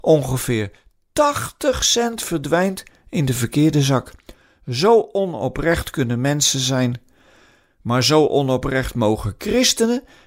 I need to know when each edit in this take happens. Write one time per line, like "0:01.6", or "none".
none